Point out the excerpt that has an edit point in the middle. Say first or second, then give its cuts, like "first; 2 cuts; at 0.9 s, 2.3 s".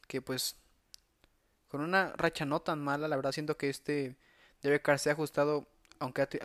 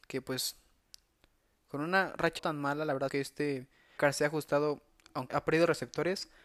second; 4 cuts; at 2.4 s, 3.1 s, 4.0 s, 5.3 s